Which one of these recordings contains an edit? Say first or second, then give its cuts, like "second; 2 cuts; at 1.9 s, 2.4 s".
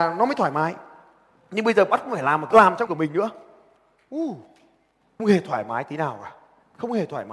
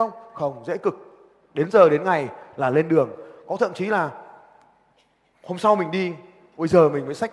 first; 3 cuts; at 2.5 s, 2.9 s, 5.2 s